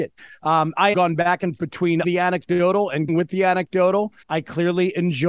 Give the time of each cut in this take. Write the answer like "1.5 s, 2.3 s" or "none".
0.9 s, 1.6 s, 2.0 s, 3.1 s, 4.2 s